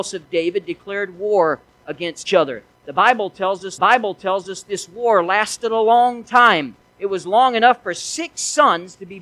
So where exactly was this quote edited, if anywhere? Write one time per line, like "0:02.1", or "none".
0:02.3
0:03.8